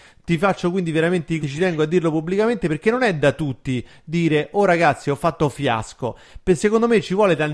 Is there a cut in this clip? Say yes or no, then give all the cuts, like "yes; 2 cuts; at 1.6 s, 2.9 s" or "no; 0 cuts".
yes; 1 cut; at 1.4 s